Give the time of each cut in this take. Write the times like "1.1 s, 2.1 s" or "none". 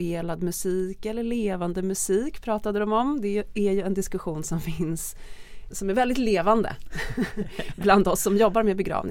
5.7 s